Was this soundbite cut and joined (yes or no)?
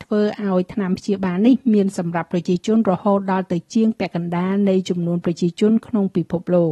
no